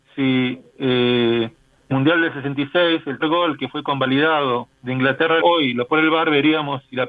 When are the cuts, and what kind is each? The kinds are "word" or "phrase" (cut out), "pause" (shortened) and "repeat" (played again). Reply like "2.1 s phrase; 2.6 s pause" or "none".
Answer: 1.9 s word; 3.2 s word; 4.7 s pause; 5.4 s word; 5.9 s word